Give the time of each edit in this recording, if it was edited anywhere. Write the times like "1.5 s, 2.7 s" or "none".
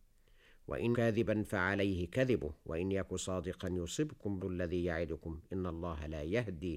0.9 s, 4.4 s